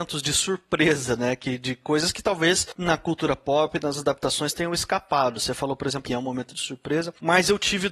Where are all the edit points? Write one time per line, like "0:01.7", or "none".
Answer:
0:06.1